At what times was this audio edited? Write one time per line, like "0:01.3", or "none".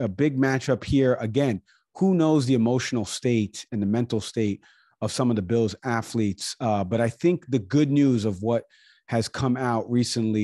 none

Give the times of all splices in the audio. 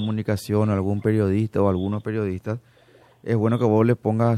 none

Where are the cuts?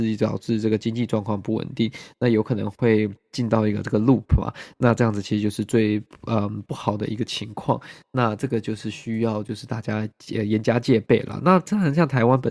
none

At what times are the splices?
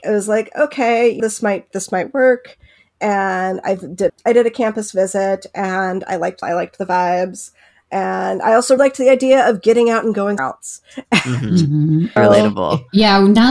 0:01.2
0:01.7
0:04.1
0:06.4
0:08.8
0:10.4
0:12.2

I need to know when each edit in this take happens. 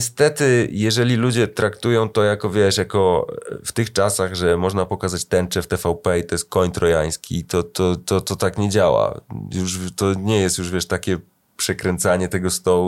none

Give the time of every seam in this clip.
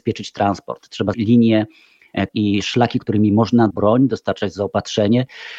0:01.1
0:02.3
0:03.0
0:03.7

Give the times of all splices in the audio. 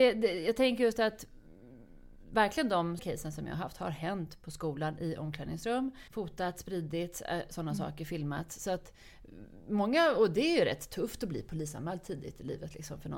0:03.0
0:06.1

